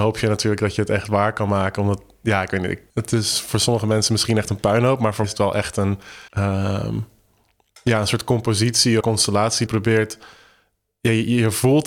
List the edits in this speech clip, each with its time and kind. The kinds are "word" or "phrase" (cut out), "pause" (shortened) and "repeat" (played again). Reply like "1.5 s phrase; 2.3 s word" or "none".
2.9 s pause; 5.2 s word; 6.3 s pause; 9.0 s phrase; 9.7 s phrase